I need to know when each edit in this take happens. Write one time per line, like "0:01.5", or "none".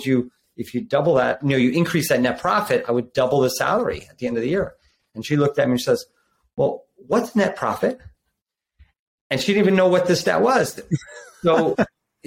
0:01.4